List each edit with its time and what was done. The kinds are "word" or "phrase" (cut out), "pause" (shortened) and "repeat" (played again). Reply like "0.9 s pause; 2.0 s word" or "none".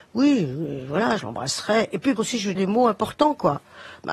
2.2 s word; 2.5 s word